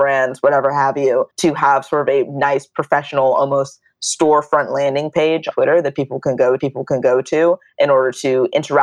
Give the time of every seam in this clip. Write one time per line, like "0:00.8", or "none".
0:01.3
0:05.5
0:06.6